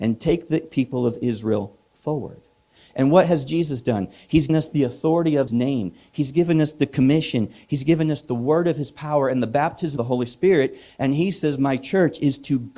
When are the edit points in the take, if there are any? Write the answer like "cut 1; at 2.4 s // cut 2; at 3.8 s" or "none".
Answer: cut 1; at 4.5 s // cut 2; at 5.5 s // cut 3; at 10.0 s